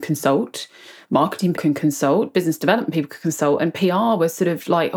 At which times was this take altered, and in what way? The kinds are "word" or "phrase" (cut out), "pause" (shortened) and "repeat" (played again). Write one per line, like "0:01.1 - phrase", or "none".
0:01.5 - word